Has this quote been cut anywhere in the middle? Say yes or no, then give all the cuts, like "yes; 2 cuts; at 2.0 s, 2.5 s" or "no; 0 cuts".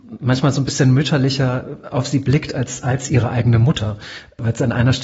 no; 0 cuts